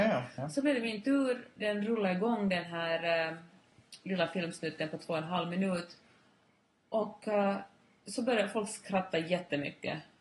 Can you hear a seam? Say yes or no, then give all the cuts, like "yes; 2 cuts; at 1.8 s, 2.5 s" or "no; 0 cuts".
no; 0 cuts